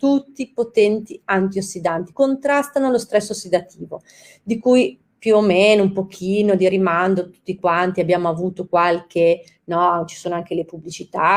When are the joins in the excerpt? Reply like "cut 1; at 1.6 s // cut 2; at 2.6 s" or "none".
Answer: cut 1; at 2.1 s

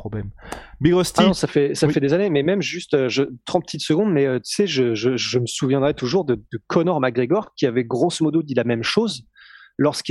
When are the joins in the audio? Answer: cut 1; at 6.5 s

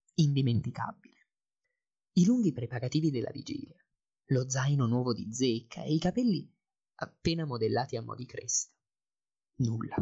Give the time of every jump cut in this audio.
none

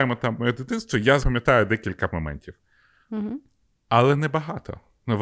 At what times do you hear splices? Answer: cut 1; at 1.2 s // cut 2; at 2.1 s

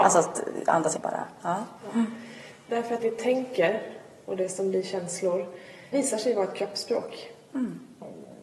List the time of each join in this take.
cut 1; at 0.9 s // cut 2; at 3.0 s // cut 3; at 5.9 s

